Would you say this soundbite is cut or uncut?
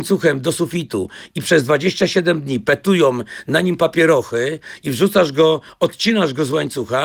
uncut